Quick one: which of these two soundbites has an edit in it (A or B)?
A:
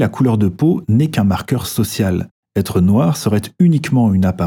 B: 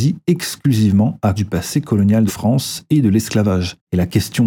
B